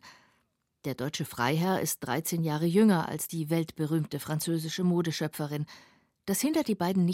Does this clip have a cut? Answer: no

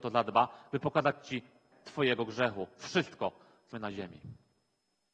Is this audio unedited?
no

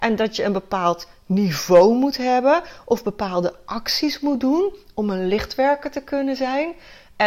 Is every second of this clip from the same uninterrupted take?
yes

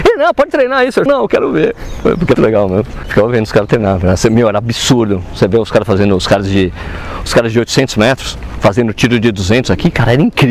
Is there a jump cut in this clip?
yes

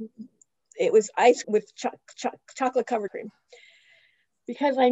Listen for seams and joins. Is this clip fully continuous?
no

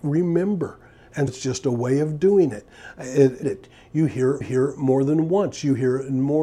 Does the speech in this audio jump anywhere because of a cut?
yes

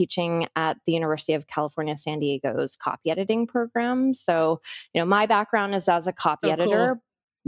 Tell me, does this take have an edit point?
no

